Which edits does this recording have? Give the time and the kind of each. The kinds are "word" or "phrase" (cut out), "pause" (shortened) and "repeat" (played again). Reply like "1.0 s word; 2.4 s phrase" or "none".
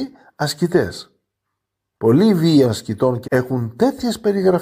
2.6 s word; 3.2 s word

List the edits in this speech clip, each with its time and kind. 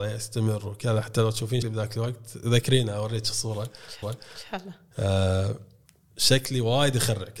1.6 s word; 4.0 s repeat; 5.9 s pause

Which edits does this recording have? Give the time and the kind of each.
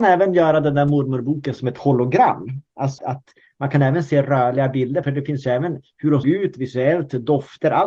3.0 s word; 5.0 s word; 6.2 s word

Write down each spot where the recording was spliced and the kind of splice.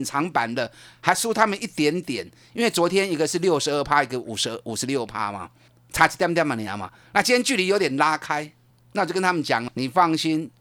9.7 s word

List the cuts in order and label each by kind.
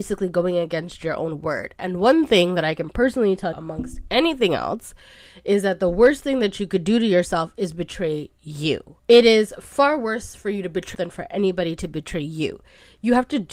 3.5 s word; 9.0 s pause; 10.9 s word

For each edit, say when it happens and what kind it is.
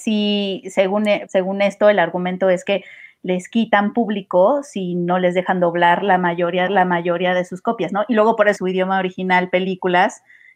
1.3 s word; 6.7 s repeat; 8.6 s phrase

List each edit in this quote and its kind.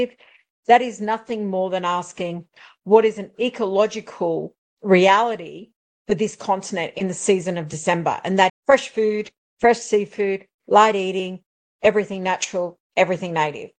8.5 s word

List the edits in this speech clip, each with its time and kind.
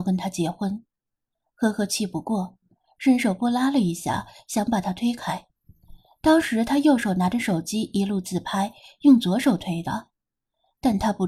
none

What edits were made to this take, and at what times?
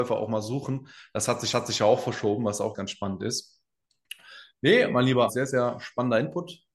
1.5 s repeat; 2.7 s word; 5.3 s word

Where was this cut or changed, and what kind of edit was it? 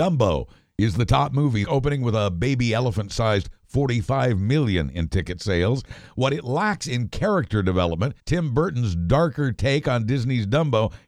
1.6 s phrase; 8.2 s pause

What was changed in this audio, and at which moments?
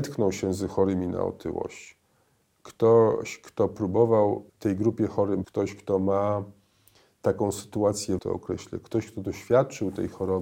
4.5 s pause; 5.4 s word; 8.2 s phrase

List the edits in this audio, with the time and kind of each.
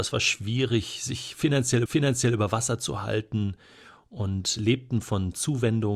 1.9 s repeat

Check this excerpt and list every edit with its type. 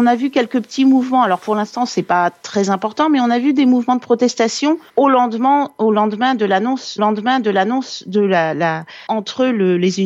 4.9 s pause; 7.0 s repeat; 9.1 s word

